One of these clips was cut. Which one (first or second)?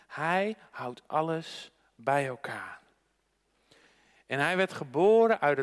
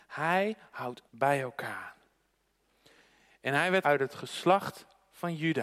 second